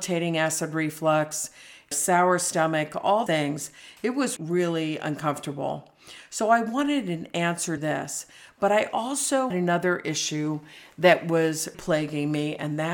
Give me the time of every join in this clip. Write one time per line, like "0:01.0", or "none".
0:01.9
0:03.3
0:04.4
0:07.8
0:09.5
0:11.7